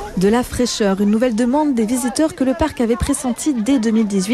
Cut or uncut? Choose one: uncut